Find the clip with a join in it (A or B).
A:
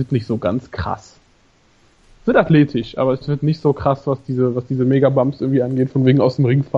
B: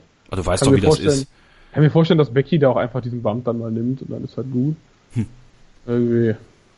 A